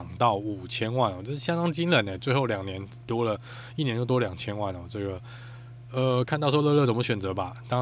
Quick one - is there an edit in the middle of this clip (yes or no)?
no